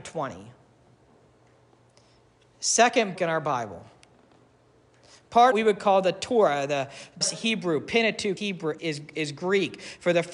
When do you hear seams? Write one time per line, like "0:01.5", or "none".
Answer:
0:03.2
0:05.5
0:07.2
0:08.4
0:08.8
0:09.1